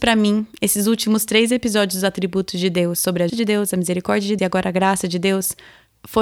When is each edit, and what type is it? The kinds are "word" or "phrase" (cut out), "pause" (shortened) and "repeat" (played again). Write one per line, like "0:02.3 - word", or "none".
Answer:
0:03.3 - word
0:04.4 - word